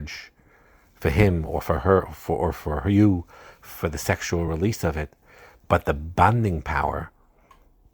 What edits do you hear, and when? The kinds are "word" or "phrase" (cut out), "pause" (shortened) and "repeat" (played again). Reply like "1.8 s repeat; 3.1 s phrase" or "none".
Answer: none